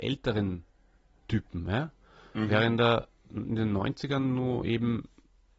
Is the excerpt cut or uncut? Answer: uncut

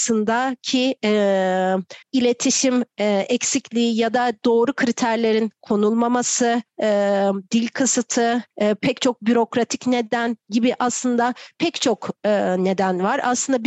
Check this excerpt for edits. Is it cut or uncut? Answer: cut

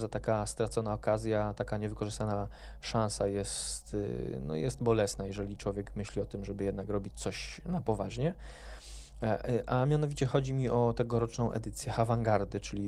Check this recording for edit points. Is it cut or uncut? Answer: uncut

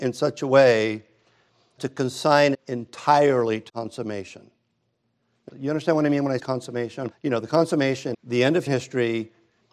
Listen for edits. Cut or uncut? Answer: cut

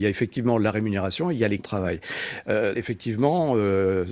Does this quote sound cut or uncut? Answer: cut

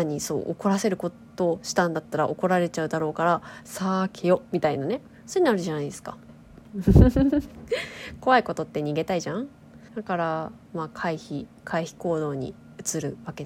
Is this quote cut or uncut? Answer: cut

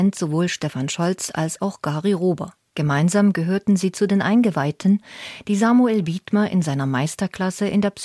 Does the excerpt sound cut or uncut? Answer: uncut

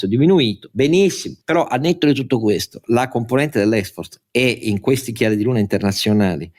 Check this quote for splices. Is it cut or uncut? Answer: uncut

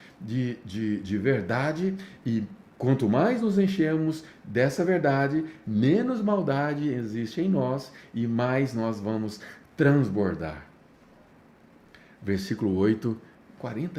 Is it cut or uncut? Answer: uncut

